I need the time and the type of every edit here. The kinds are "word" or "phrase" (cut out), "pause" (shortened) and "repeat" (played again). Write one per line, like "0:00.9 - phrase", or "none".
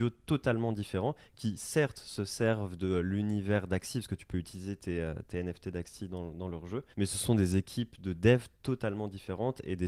0:06.9 - pause